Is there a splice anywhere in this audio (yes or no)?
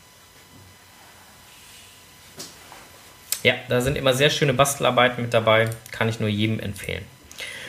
no